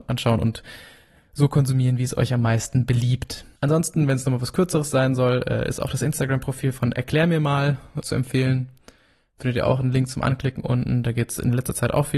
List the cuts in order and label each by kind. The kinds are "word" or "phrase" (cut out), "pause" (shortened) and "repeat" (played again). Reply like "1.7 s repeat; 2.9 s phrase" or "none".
3.6 s pause; 8.0 s word